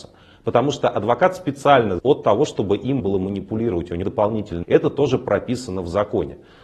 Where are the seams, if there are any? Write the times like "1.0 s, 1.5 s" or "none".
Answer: 2.0 s, 3.0 s, 4.0 s, 4.6 s